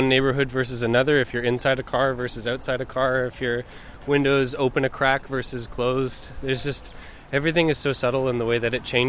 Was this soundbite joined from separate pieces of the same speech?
no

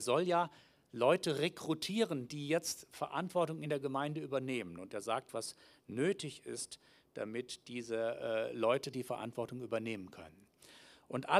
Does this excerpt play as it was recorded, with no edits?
yes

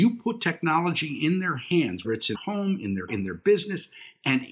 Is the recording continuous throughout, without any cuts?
no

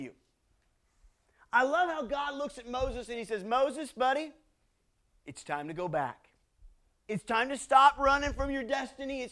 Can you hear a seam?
no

